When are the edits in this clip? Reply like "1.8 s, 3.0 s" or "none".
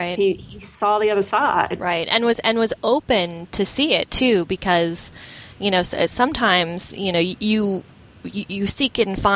none